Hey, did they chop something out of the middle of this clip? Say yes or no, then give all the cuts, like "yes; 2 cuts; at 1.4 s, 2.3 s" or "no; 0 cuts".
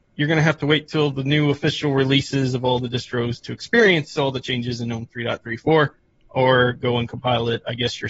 no; 0 cuts